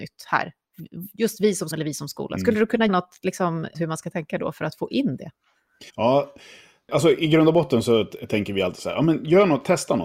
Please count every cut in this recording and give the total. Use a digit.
4